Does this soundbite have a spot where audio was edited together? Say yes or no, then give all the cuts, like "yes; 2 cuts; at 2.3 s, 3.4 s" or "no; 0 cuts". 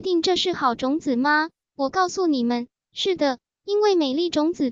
no; 0 cuts